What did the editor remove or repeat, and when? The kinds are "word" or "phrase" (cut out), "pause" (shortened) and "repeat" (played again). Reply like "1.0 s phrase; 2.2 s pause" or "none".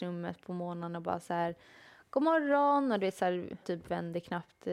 3.6 s word